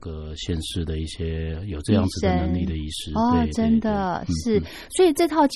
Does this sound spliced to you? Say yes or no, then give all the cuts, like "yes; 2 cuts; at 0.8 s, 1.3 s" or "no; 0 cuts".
no; 0 cuts